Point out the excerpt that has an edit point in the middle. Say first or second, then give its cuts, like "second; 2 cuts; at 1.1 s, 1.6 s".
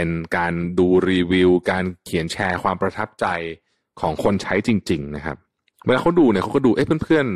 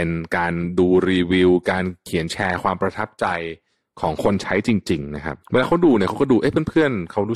second; 1 cut; at 5.4 s